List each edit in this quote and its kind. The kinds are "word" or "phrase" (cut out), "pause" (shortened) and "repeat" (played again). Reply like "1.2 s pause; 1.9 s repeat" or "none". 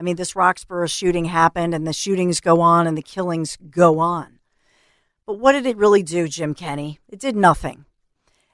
none